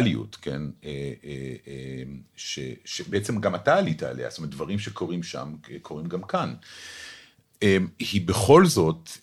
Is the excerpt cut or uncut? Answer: uncut